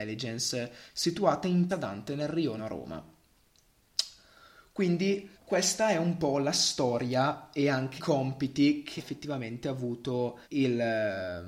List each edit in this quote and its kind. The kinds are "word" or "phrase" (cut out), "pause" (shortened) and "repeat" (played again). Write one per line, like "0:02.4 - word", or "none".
0:01.7 - word
0:02.6 - word
0:05.3 - pause
0:08.0 - word
0:09.0 - word
0:10.4 - pause